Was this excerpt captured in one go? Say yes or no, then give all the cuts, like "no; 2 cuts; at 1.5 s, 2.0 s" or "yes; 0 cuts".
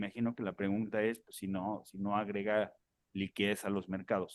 yes; 0 cuts